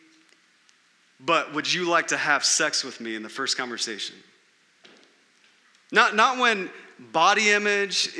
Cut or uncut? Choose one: uncut